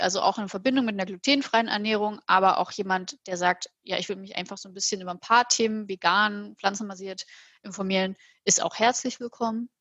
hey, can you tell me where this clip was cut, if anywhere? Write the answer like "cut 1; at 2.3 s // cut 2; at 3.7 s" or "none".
none